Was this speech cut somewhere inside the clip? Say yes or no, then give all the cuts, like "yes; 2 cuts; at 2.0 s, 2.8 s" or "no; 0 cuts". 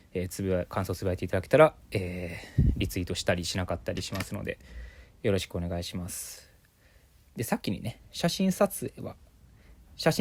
no; 0 cuts